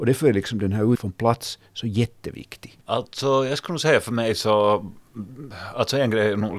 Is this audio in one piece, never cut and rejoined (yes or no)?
no